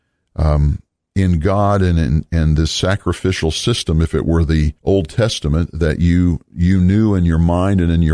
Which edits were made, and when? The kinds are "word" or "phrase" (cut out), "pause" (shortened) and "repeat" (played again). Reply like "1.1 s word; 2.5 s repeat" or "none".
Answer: 4.8 s pause